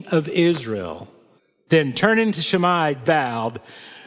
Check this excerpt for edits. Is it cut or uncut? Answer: cut